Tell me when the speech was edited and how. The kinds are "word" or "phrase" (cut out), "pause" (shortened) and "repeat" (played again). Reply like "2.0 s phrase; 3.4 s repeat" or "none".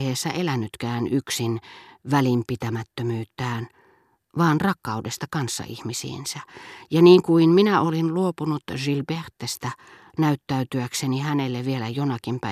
none